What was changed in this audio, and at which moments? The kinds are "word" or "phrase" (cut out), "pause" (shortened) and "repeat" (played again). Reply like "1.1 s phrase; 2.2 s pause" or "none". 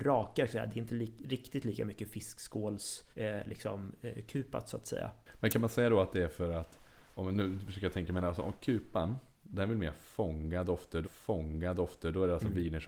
3.1 s pause; 11.0 s repeat